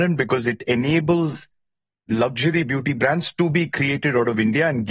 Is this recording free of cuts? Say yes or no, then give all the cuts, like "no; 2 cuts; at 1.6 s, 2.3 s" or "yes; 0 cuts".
yes; 0 cuts